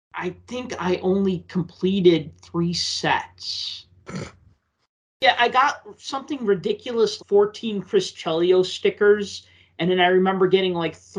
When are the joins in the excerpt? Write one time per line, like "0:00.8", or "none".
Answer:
0:07.2